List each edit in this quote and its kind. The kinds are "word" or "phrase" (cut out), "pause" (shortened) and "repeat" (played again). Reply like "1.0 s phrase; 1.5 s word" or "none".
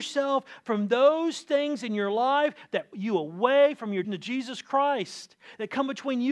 2.9 s word; 4.0 s word